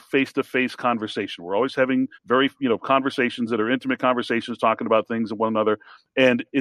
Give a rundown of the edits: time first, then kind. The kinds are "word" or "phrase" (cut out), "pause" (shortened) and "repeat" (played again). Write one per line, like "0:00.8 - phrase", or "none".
0:02.1 - pause